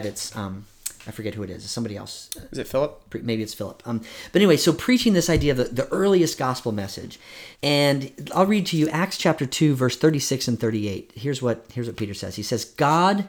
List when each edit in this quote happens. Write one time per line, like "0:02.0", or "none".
0:07.5